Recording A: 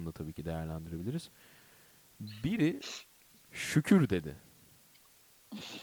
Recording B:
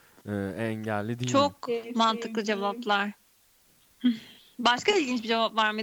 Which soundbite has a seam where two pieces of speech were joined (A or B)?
B